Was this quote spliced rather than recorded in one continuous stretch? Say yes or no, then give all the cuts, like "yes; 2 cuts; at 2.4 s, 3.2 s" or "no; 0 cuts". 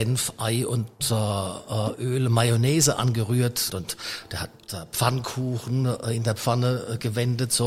yes; 1 cut; at 3.7 s